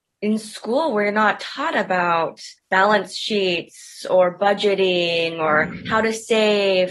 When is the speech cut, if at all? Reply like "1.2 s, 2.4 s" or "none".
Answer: 2.6 s